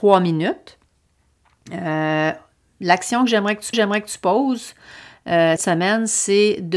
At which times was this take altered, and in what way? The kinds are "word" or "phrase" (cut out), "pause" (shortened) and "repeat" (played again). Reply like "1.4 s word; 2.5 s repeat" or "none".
3.7 s repeat; 5.6 s word